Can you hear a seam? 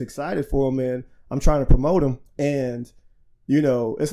yes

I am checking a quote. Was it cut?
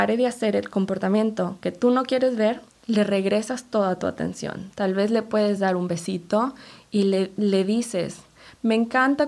no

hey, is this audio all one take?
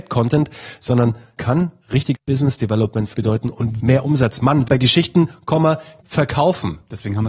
no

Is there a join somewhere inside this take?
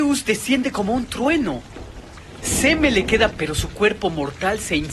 yes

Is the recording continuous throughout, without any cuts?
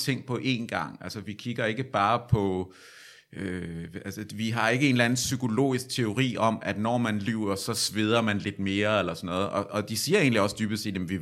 no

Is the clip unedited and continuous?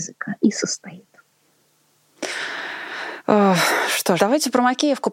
no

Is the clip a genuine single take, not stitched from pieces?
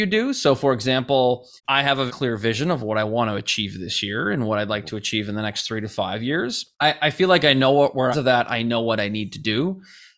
no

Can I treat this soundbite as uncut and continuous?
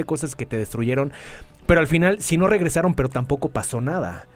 no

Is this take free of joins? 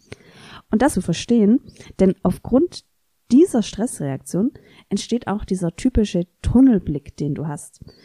no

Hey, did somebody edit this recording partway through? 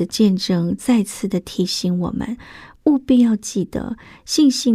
no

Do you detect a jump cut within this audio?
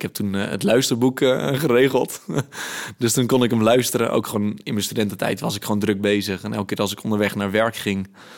no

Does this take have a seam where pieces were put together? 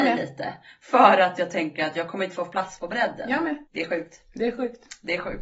yes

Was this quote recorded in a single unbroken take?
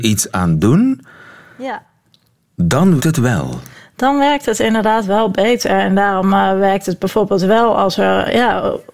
no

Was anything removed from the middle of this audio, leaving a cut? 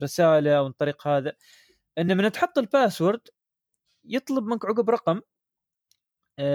no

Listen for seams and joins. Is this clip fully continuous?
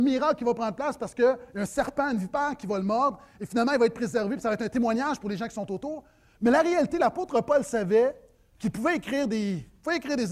yes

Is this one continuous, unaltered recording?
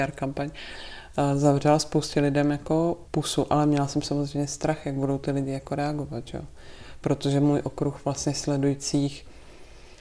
no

